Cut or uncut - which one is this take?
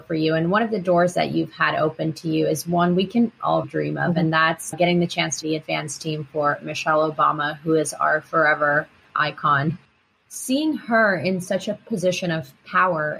cut